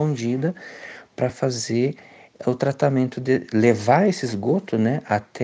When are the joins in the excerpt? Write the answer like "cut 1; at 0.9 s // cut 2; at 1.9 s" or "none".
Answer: none